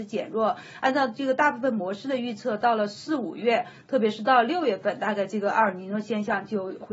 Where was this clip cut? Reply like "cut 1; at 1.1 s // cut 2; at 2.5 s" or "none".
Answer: none